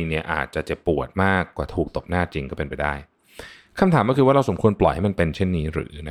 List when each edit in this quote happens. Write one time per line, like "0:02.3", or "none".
none